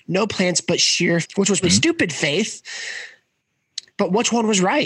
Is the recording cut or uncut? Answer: cut